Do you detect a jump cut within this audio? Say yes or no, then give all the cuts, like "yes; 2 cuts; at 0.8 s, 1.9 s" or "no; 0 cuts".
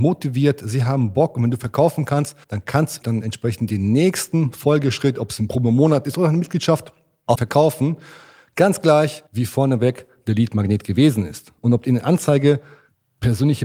yes; 4 cuts; at 2.4 s, 3.0 s, 7.3 s, 9.3 s